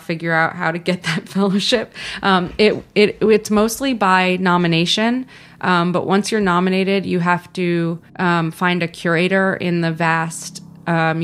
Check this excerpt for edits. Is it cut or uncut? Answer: cut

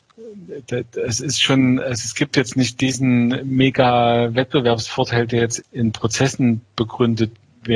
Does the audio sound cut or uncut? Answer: cut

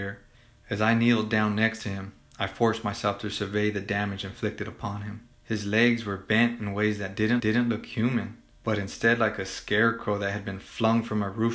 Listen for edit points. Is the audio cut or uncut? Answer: cut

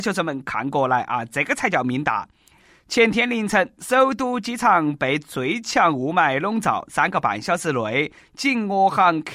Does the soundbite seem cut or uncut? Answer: uncut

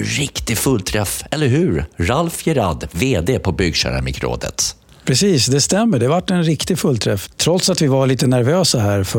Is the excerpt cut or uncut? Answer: uncut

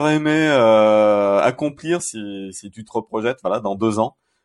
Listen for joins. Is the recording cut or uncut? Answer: uncut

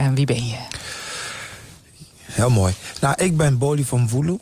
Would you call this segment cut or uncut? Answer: uncut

